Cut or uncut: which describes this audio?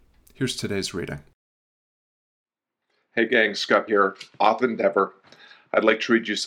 cut